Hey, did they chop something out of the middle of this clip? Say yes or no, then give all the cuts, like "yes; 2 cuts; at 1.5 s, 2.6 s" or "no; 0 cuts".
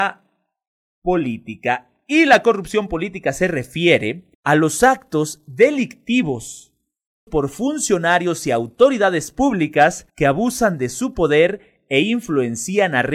yes; 3 cuts; at 4.3 s, 7.3 s, 10.1 s